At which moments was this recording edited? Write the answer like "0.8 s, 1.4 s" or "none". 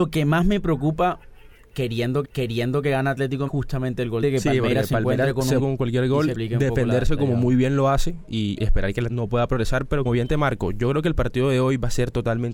2.2 s, 3.5 s, 4.2 s, 5.6 s, 6.3 s, 8.6 s, 9.1 s, 10.0 s